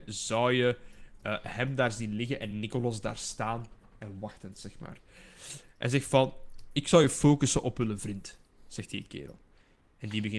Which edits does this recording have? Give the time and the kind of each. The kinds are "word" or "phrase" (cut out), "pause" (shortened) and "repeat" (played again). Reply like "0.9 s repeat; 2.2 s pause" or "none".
none